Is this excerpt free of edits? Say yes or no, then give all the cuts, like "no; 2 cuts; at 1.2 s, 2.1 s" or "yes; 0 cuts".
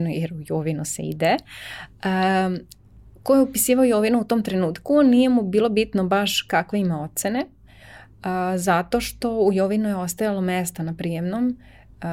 yes; 0 cuts